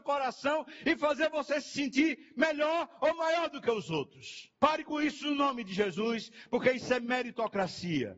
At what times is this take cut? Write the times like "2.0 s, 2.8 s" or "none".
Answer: 4.5 s